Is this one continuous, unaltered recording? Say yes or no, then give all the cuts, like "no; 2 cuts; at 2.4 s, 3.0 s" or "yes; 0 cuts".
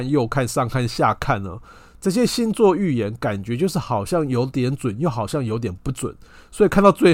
yes; 0 cuts